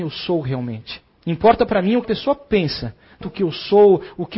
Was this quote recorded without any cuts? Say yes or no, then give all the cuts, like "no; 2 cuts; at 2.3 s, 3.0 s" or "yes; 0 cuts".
no; 3 cuts; at 1.1 s, 2.0 s, 3.2 s